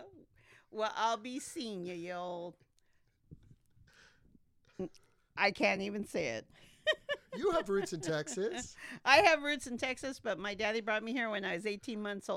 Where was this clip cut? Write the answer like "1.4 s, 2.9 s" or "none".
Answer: none